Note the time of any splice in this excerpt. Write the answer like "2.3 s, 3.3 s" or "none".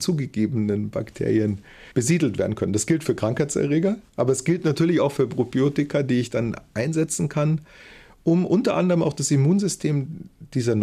1.9 s